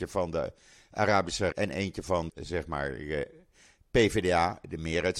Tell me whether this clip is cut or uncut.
cut